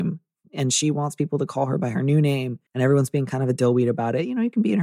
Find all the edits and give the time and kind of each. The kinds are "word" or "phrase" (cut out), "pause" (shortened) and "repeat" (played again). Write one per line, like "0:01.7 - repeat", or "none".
0:02.7 - pause